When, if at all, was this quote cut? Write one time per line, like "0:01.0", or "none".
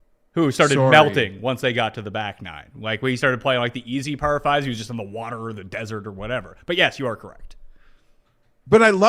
none